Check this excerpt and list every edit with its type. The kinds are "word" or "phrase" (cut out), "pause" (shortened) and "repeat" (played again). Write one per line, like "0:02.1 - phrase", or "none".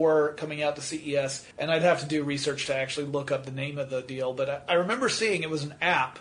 0:01.5 - pause

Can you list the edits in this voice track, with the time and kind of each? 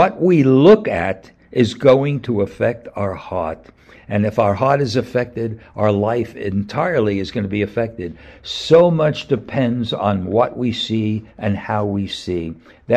none

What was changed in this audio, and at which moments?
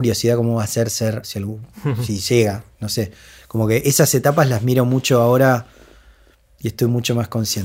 0:01.2 - word

